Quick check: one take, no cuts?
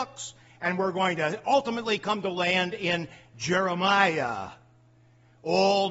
yes; 0 cuts

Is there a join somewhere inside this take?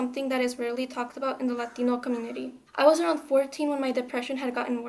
yes; 1 cut; at 2.7 s

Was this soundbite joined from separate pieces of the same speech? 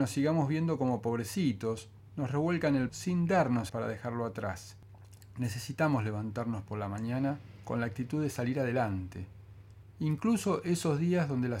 yes; 2 cuts; at 2.9 s, 3.7 s

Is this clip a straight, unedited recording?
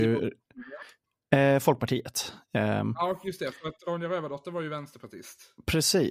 yes; 0 cuts

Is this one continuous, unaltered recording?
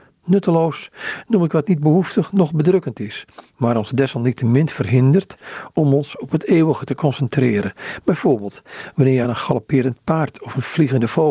yes; 0 cuts

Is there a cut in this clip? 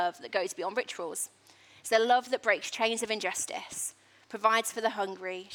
no; 0 cuts

